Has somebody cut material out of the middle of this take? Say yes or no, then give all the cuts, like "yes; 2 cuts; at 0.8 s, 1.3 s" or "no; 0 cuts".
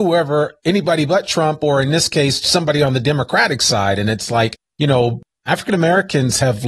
no; 0 cuts